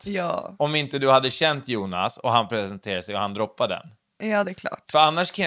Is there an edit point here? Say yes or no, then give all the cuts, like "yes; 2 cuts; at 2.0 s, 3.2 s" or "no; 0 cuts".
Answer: no; 0 cuts